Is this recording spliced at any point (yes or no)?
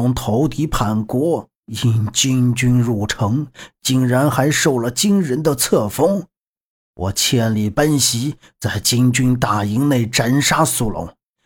no